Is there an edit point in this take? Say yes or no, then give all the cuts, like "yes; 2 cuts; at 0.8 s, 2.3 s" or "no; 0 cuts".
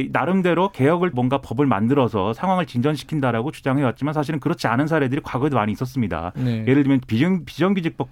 yes; 1 cut; at 1.1 s